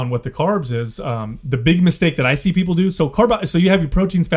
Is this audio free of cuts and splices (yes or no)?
yes